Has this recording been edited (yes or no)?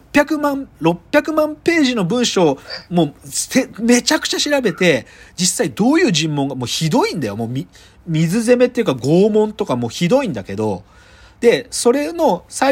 no